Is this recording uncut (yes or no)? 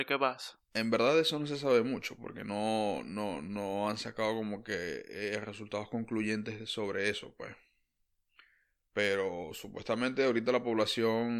yes